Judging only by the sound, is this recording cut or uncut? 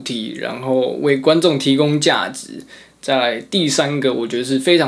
uncut